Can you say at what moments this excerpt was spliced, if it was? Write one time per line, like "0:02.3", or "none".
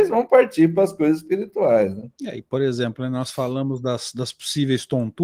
0:02.1